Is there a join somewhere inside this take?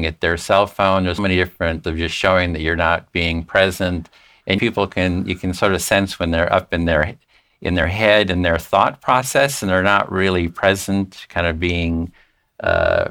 yes; 3 cuts; at 1.2 s, 1.8 s, 4.6 s

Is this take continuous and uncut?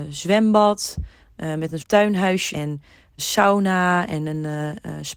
no; 3 cuts; at 1.8 s, 2.5 s, 3.2 s

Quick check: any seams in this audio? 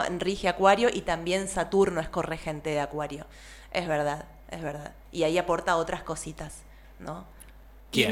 no; 0 cuts

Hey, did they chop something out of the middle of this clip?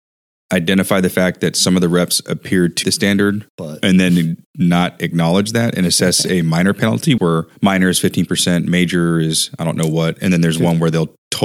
yes; 5 cuts; at 2.8 s, 3.5 s, 4.4 s, 7.2 s, 7.6 s

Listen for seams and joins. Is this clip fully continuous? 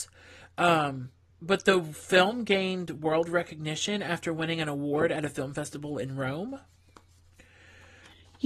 yes; 0 cuts

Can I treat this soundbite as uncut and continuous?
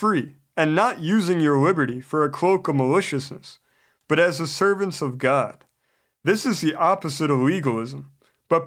yes; 0 cuts

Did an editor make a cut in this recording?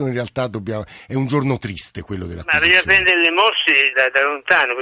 yes; 1 cut; at 3.9 s

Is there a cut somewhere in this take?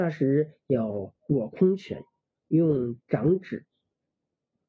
no; 0 cuts

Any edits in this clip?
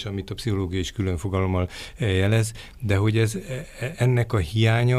no; 0 cuts

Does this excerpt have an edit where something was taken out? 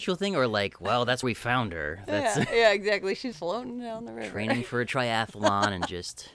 yes; 2 cuts; at 1.2 s, 3.3 s

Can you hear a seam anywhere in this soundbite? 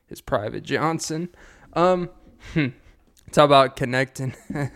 yes; 1 cut; at 3.1 s

